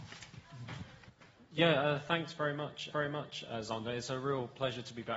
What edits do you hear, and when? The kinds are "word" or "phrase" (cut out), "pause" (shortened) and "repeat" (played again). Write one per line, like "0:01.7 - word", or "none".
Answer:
0:02.9 - repeat